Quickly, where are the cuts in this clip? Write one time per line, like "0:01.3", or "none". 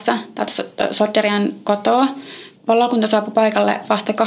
0:02.6

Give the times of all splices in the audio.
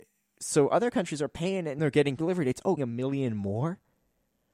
0:01.8
0:02.2
0:02.8

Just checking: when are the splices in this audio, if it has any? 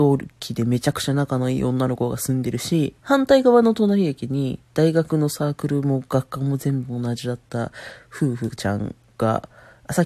0:03.0
0:04.6
0:09.1

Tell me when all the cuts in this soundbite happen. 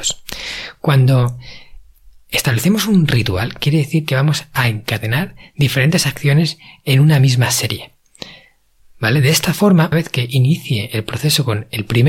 0:09.9

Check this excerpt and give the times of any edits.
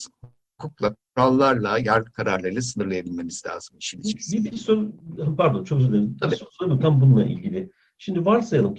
none

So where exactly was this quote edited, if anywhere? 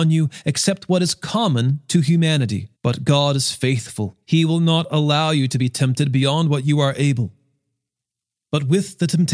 0:02.7
0:04.2

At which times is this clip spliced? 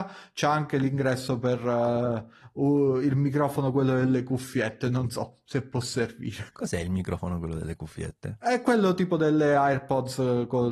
0:06.5

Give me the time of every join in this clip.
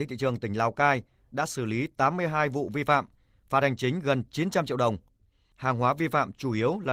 none

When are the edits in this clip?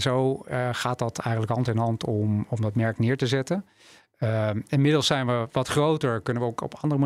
none

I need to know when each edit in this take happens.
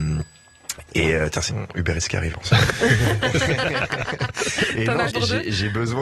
0:01.5
0:02.3
0:05.1

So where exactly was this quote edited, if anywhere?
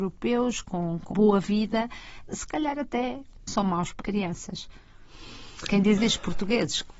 0:01.1
0:03.5
0:04.0
0:06.0

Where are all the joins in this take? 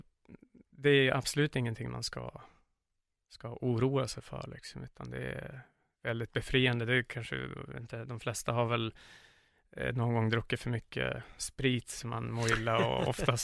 none

